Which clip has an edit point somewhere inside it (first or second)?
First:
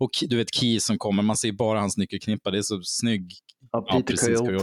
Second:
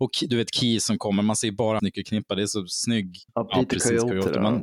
second